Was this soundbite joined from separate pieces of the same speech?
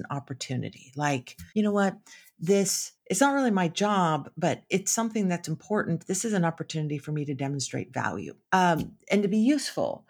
yes; 3 cuts; at 1.5 s, 2.9 s, 8.4 s

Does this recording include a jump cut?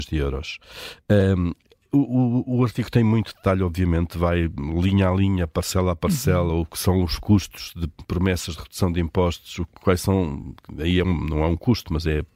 no; 0 cuts

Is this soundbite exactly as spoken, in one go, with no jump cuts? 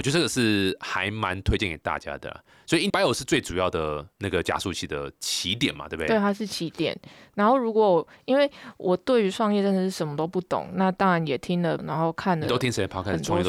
no; 2 cuts; at 2.9 s, 11.8 s

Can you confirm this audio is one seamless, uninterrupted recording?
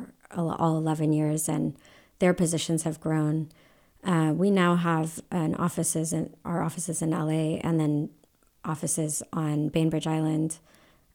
yes; 0 cuts

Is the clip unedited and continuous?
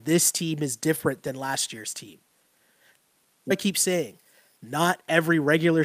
no; 1 cut; at 3.5 s

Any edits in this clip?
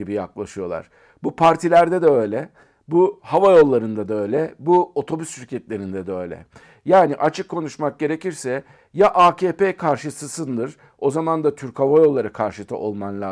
no; 0 cuts

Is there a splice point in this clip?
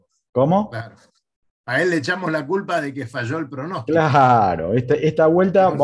no; 0 cuts

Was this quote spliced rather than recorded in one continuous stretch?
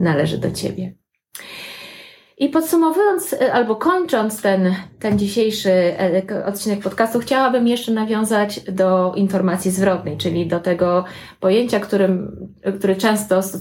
no; 0 cuts

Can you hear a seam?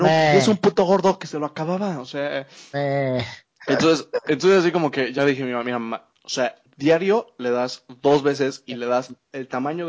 no; 0 cuts

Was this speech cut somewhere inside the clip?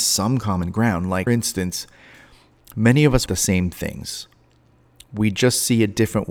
yes; 2 cuts; at 1.3 s, 3.3 s

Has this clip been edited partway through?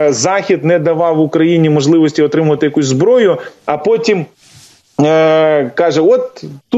no; 0 cuts

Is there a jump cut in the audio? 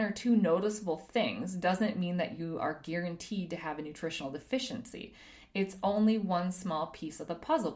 no; 0 cuts

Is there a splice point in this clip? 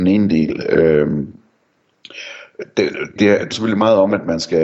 yes; 2 cuts; at 3.2 s, 3.5 s

